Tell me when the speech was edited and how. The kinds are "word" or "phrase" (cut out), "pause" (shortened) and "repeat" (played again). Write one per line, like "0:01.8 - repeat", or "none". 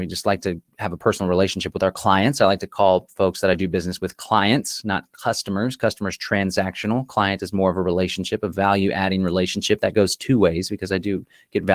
none